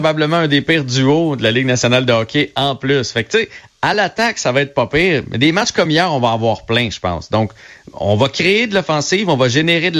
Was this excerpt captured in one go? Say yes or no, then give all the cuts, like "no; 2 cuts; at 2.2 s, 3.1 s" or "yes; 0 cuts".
yes; 0 cuts